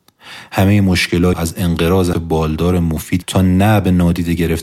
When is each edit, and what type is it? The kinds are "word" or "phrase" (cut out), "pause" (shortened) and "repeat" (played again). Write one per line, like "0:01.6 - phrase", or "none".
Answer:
0:01.3 - word
0:02.1 - word
0:03.2 - word

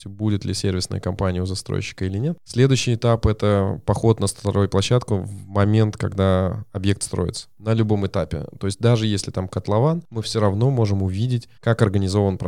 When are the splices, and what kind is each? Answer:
0:11.6 - pause

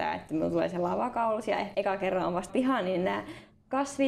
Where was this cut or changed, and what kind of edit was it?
0:01.7 - phrase
0:02.5 - word

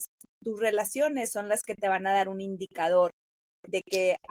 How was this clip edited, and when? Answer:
none

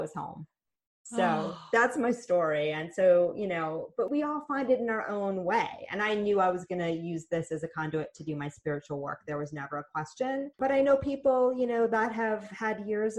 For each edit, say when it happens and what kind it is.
0:10.5 - pause

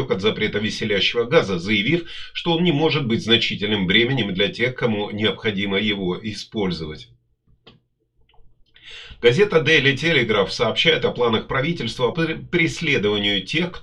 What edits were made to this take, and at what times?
0:12.1 - word

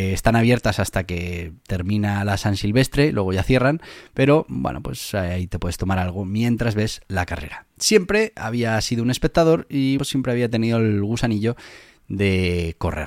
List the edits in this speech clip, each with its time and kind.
0:10.0 - word

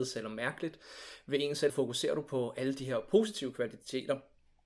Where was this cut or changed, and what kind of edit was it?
0:01.7 - word

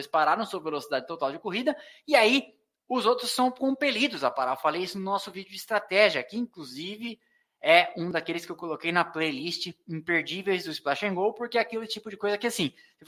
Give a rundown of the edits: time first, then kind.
none

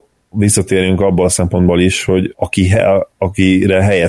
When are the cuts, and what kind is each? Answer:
none

